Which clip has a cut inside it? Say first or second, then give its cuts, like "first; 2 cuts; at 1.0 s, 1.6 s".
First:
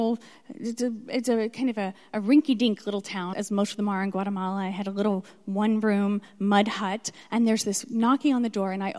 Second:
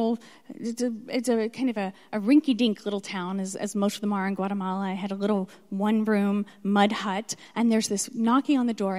first; 1 cut; at 3.3 s